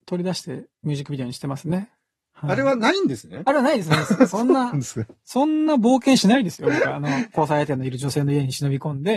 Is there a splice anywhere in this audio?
no; 0 cuts

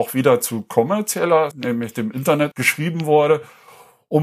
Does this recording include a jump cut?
yes; 2 cuts; at 1.5 s, 2.5 s

